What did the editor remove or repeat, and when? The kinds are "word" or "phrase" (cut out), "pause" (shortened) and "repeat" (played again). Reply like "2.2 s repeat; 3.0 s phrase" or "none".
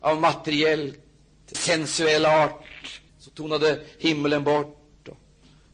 1.5 s word; 3.1 s pause